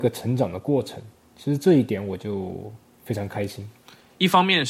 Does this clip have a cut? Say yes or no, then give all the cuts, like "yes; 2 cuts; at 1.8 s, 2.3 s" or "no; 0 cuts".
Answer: no; 0 cuts